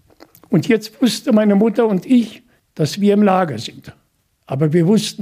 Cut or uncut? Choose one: uncut